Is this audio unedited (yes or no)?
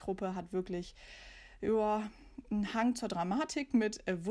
yes